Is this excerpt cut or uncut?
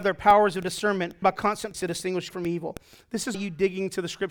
cut